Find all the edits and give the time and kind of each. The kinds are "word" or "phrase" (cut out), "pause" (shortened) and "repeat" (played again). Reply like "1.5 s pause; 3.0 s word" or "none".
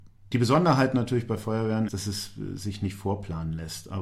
1.9 s word